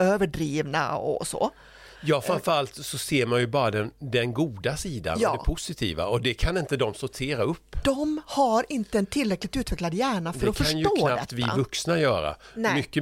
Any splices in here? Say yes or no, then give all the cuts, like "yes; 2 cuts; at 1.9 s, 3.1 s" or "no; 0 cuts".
no; 0 cuts